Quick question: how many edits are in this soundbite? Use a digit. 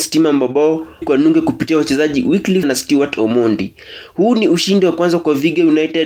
2